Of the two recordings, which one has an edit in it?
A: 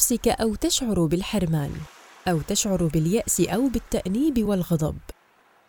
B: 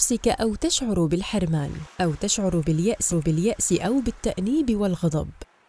B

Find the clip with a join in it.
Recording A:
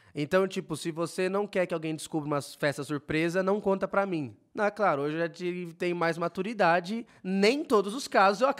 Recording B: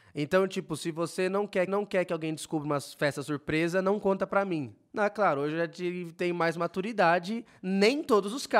B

